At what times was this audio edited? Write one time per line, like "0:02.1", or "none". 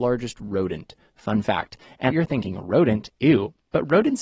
0:02.1